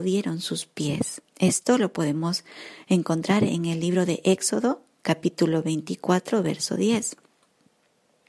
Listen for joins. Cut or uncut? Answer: cut